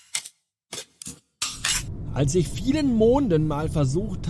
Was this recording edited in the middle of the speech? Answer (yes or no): yes